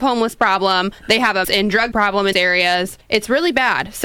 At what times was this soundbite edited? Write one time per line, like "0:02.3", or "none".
0:01.0
0:01.4
0:01.9
0:02.3
0:03.0